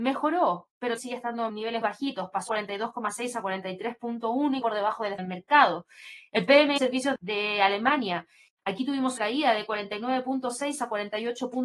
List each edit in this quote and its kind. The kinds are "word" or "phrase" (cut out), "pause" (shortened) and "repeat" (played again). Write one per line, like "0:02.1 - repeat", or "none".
0:01.0 - word
0:01.5 - word
0:01.8 - word
0:02.5 - word
0:04.6 - word
0:05.2 - word
0:06.8 - word
0:07.2 - word
0:09.2 - word